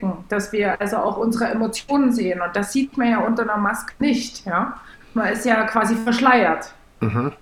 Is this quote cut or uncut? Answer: uncut